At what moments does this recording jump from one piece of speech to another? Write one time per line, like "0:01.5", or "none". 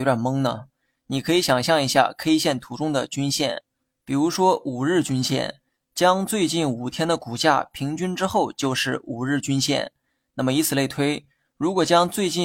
none